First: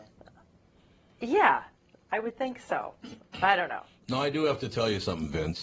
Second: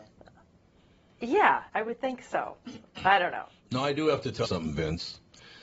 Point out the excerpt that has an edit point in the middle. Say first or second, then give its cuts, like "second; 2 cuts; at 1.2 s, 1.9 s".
second; 2 cuts; at 1.7 s, 4.4 s